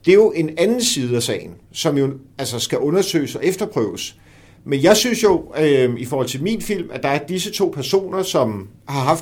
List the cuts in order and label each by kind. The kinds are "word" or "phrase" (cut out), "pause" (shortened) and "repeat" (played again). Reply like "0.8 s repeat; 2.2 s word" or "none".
none

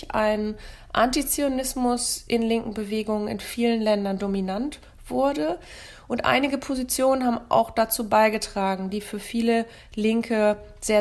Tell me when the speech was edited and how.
none

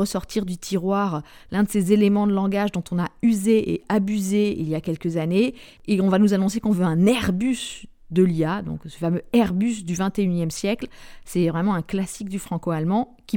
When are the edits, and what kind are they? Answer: none

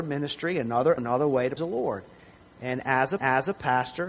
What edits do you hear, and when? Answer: 1.0 s word; 1.6 s word; 3.2 s repeat

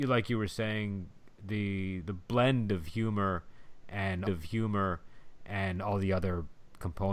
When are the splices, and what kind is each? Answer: 4.2 s repeat

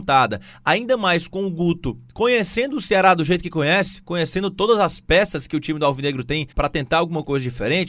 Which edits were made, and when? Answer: 6.5 s pause

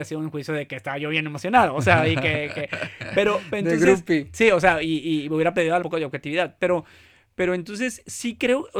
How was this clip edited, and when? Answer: 5.8 s phrase

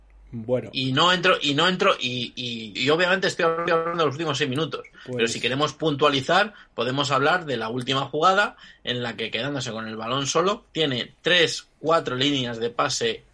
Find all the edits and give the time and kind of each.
2.8 s word; 3.7 s repeat; 10.7 s pause

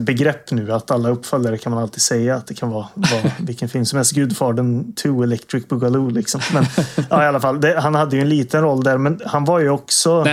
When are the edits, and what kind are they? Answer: none

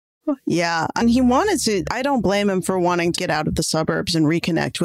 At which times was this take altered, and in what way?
1.0 s word; 1.9 s word; 3.2 s word

